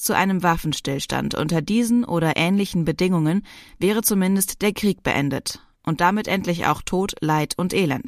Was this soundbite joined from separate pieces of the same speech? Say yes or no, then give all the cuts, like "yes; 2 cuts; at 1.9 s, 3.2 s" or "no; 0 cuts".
no; 0 cuts